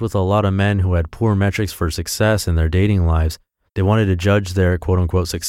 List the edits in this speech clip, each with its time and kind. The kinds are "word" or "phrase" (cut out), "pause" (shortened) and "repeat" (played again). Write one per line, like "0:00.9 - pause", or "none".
none